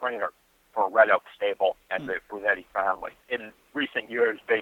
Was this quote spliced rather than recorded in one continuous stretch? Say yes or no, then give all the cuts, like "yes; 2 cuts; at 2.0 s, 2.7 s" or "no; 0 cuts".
yes; 1 cut; at 3.2 s